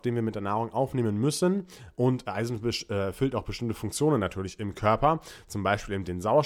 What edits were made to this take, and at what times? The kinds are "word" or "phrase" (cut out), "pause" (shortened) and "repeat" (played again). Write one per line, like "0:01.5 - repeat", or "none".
none